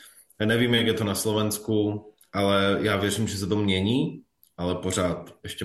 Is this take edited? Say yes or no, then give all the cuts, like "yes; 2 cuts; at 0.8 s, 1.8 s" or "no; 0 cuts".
no; 0 cuts